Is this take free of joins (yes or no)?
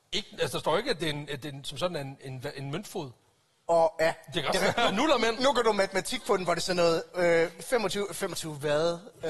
yes